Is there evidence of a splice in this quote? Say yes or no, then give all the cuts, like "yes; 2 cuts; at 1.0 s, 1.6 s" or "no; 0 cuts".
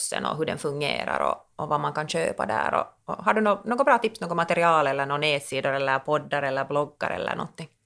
no; 0 cuts